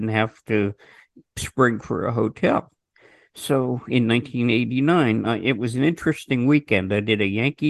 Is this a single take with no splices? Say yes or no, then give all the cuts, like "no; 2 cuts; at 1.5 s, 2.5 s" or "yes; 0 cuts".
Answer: yes; 0 cuts